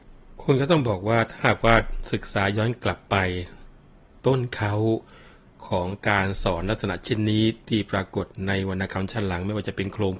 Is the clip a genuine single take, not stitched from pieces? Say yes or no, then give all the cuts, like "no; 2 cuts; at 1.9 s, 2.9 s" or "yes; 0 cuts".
no; 1 cut; at 7.6 s